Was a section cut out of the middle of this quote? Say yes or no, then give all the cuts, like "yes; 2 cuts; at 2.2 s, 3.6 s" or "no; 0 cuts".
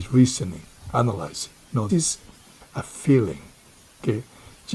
yes; 1 cut; at 1.9 s